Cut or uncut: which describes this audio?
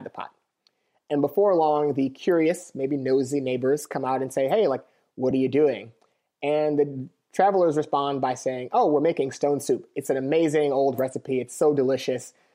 uncut